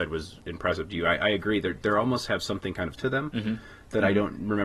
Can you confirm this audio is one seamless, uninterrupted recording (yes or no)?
no